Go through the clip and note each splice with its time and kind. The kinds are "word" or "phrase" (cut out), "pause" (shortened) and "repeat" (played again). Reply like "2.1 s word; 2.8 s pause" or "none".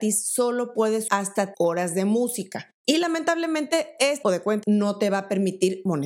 1.1 s word; 1.5 s word; 4.2 s word; 4.6 s word